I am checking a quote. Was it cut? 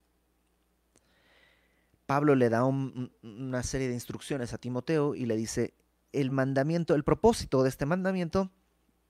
no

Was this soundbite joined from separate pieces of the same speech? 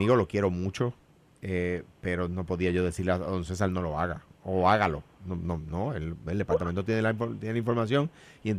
no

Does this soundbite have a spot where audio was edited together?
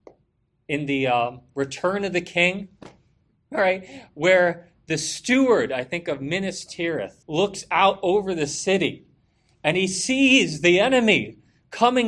yes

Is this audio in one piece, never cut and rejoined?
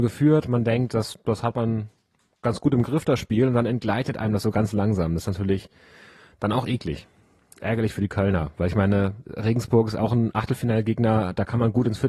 yes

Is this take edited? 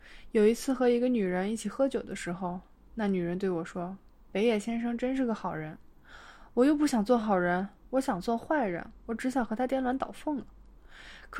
no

